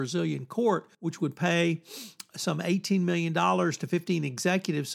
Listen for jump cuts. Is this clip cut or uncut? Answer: cut